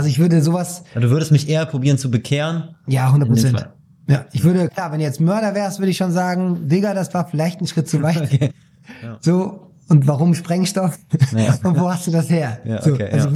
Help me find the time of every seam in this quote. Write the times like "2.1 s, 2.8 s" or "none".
none